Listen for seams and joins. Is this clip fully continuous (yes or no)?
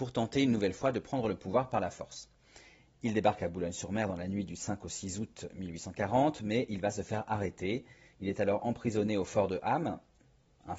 yes